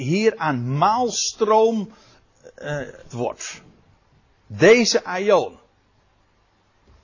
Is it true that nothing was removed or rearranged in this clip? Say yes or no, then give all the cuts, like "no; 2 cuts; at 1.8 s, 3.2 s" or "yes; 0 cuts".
no; 1 cut; at 3.1 s